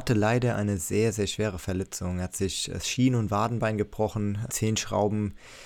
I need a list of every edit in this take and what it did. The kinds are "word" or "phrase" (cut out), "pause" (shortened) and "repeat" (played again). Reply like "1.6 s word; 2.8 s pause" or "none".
4.5 s word